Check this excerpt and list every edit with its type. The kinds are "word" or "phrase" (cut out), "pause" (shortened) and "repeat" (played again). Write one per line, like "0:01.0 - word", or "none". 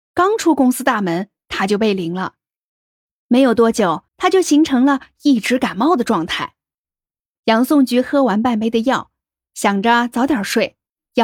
0:04.1 - pause